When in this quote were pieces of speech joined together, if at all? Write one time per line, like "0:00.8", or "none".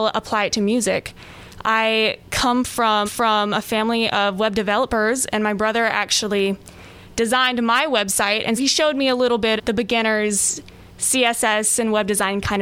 0:03.1
0:08.6
0:09.6
0:10.9